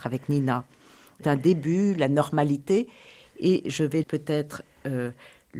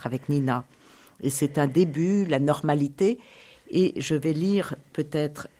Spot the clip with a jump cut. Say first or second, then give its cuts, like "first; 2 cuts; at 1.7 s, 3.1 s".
first; 2 cuts; at 1.2 s, 4.0 s